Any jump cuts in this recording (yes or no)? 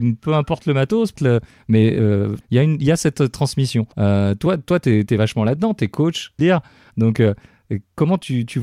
yes